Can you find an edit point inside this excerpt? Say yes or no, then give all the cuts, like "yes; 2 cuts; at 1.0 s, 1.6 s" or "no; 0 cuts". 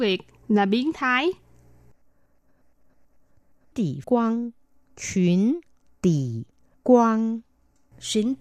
yes; 3 cuts; at 3.7 s, 4.0 s, 6.7 s